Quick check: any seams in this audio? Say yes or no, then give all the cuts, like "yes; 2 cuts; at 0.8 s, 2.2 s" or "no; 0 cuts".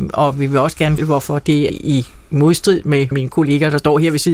yes; 3 cuts; at 1.0 s, 1.7 s, 3.1 s